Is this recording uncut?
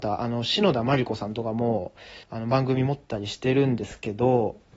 no; 1 cut; at 2.2 s

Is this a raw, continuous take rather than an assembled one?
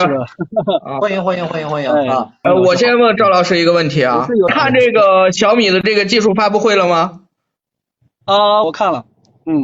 no; 1 cut; at 8.6 s

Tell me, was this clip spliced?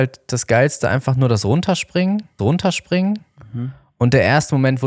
yes; 1 cut; at 2.4 s

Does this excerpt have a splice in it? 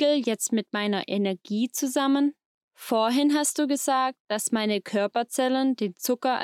no; 0 cuts

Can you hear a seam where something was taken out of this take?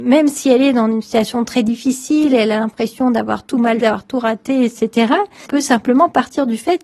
yes; 2 cuts; at 3.8 s, 5.5 s

